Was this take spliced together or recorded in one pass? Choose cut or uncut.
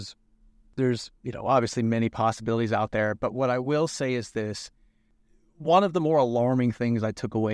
uncut